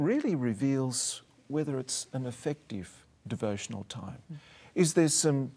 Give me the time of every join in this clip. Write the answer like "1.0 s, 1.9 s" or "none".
3.2 s

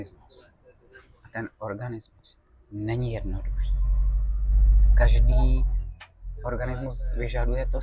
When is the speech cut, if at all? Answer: none

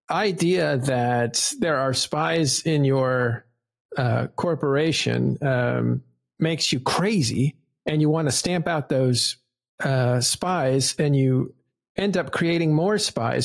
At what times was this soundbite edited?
none

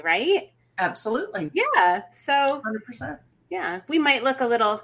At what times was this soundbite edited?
none

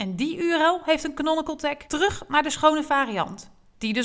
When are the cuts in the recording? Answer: 1.9 s

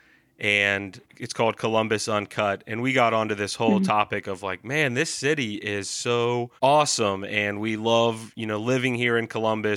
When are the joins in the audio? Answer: 1.1 s, 6.6 s

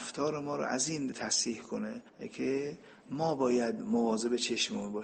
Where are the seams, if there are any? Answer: 1.1 s

